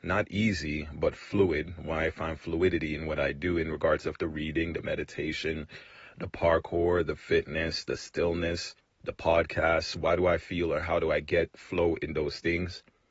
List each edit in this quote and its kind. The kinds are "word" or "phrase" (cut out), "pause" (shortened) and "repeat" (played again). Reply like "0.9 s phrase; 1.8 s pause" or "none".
8.8 s pause